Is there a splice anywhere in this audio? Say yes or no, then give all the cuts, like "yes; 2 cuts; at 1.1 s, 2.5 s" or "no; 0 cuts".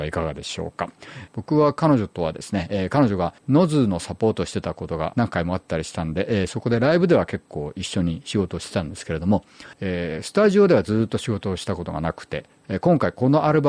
yes; 2 cuts; at 3.4 s, 9.7 s